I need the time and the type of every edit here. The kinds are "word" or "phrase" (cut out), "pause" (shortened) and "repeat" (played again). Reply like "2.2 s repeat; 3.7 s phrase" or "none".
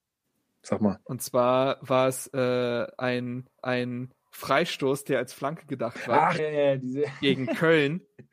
1.0 s pause; 3.6 s repeat; 6.4 s word